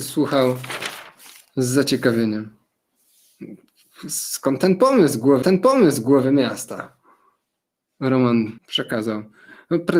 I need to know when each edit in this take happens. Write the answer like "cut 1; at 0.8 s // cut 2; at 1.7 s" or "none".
cut 1; at 5.4 s // cut 2; at 8.6 s